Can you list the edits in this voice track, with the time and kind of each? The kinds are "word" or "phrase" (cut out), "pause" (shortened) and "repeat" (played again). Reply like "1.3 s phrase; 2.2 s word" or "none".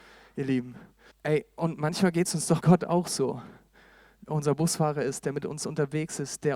1.1 s pause; 2.6 s word; 4.3 s word